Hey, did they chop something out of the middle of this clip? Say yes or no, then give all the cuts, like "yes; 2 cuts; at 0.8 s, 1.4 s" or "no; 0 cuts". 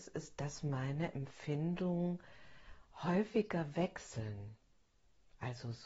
no; 0 cuts